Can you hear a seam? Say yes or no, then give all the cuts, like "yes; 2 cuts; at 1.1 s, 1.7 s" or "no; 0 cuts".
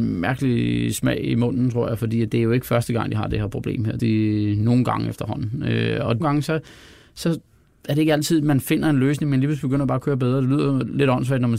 yes; 2 cuts; at 4.0 s, 6.2 s